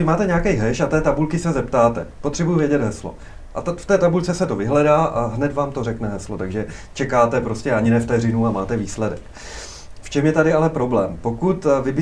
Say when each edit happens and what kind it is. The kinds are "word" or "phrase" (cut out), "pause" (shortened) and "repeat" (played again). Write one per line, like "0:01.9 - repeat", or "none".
none